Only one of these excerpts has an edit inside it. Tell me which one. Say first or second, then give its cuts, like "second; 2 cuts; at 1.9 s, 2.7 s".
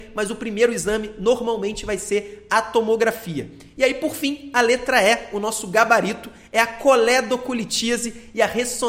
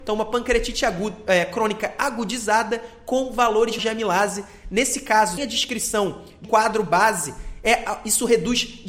second; 3 cuts; at 3.8 s, 5.4 s, 6.4 s